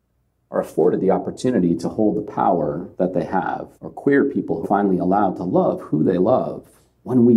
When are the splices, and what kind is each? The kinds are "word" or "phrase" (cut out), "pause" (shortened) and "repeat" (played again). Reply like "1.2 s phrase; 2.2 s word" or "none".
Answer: 2.9 s pause; 3.7 s pause; 4.6 s word